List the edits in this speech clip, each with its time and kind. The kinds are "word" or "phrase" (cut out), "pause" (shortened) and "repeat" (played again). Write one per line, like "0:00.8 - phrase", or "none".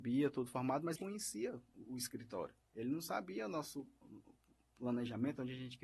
0:01.0 - phrase
0:01.9 - word